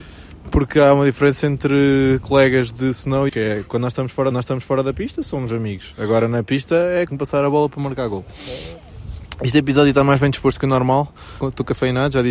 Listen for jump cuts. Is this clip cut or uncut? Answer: cut